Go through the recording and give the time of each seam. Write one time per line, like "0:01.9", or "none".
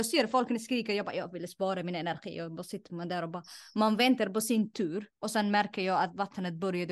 0:05.1